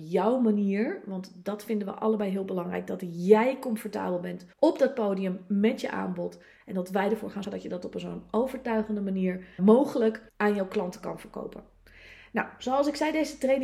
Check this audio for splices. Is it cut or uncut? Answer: cut